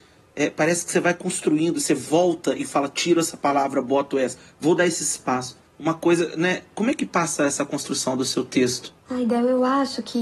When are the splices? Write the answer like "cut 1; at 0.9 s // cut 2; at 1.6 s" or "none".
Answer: cut 1; at 5.7 s // cut 2; at 9.0 s